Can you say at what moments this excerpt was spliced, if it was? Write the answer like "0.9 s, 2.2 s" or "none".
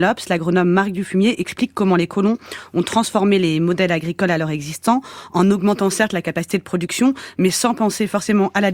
none

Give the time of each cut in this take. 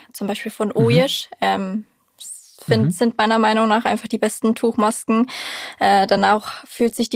none

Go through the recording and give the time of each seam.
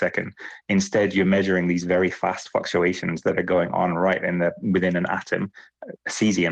none

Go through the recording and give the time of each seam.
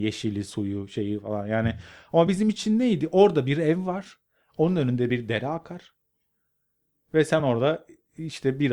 none

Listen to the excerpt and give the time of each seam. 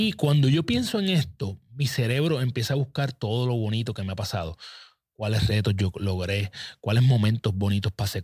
none

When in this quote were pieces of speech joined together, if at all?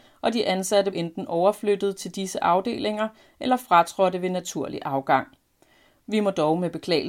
0.9 s

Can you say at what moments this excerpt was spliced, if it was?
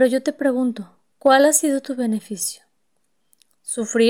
1.1 s

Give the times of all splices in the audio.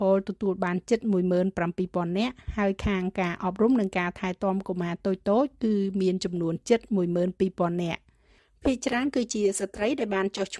none

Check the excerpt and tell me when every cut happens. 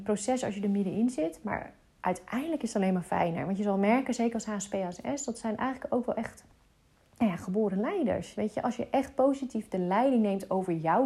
none

